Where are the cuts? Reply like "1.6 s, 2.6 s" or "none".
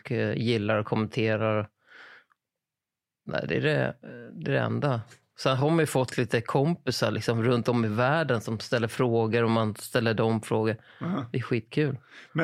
none